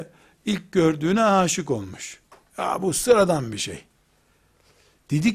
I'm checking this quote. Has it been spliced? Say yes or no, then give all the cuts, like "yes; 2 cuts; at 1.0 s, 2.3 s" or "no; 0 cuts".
no; 0 cuts